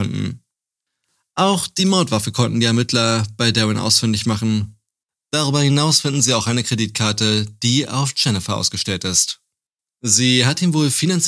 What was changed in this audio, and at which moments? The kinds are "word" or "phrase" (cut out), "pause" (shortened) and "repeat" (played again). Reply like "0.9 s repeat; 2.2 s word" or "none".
none